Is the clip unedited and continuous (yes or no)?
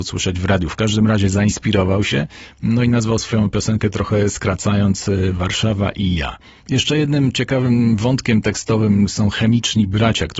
yes